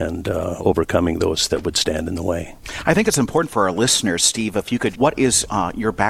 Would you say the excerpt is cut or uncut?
cut